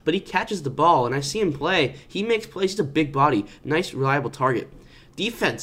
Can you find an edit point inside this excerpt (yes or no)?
no